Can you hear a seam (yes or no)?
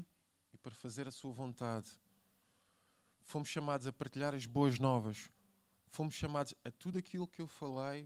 no